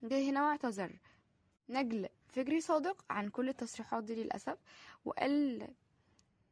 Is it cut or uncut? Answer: uncut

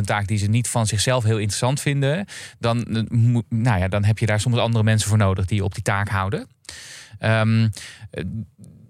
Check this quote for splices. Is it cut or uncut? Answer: uncut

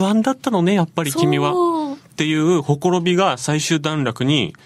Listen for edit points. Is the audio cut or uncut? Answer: cut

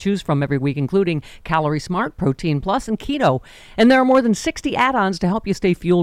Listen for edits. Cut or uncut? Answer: uncut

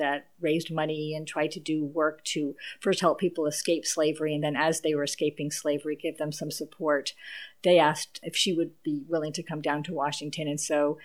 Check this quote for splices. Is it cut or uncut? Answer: uncut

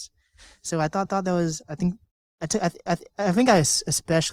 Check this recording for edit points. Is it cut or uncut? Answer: cut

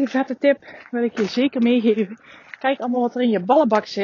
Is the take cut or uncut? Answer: uncut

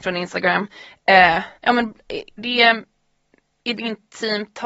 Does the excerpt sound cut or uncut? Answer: cut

